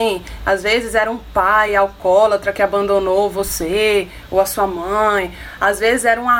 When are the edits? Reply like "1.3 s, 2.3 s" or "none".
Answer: none